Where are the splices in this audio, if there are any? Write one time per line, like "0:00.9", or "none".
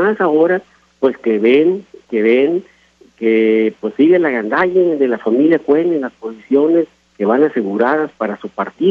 none